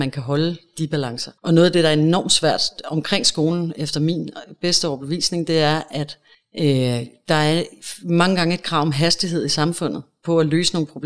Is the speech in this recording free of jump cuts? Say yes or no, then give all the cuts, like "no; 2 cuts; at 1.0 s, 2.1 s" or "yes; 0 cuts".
no; 2 cuts; at 1.4 s, 6.3 s